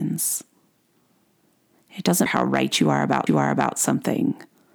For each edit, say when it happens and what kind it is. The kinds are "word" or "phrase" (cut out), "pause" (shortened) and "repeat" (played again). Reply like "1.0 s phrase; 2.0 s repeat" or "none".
2.3 s word; 3.3 s repeat

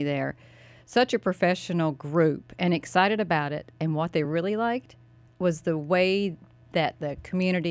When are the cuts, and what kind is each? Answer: none

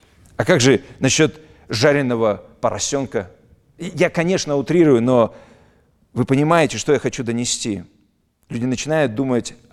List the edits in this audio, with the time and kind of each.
none

